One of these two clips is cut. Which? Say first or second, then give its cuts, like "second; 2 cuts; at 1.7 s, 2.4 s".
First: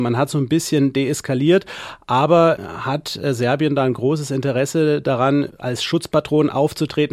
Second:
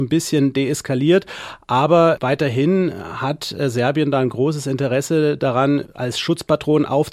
first; 1 cut; at 2.6 s